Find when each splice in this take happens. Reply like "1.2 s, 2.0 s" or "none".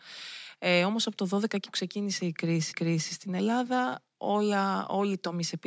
1.6 s, 2.7 s

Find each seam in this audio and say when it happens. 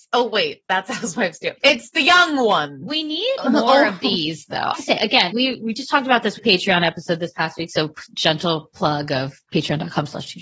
1.6 s, 4.7 s, 5.3 s, 6.4 s, 9.4 s

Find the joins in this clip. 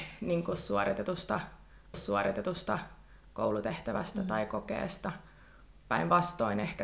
1.9 s, 5.8 s

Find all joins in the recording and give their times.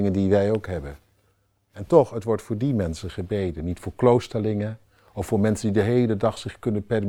none

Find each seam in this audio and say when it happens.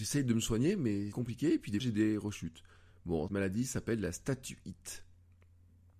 1.1 s, 1.8 s, 3.3 s

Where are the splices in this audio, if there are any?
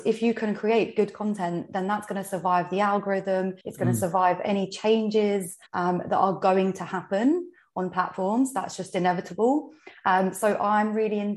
3.6 s, 5.7 s

